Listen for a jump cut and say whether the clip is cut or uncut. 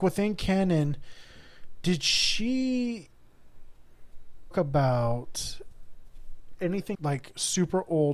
cut